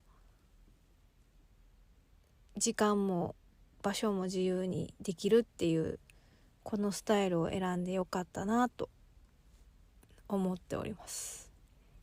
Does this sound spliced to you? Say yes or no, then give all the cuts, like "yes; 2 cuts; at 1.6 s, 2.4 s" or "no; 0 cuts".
no; 0 cuts